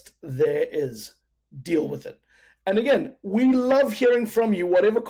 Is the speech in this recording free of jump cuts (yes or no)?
yes